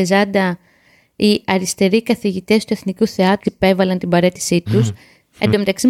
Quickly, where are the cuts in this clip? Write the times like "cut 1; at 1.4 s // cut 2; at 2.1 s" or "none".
cut 1; at 3.4 s